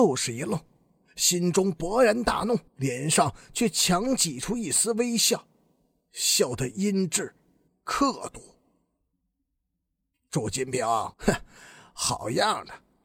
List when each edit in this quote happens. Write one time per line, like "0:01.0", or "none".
0:02.7
0:07.7
0:11.1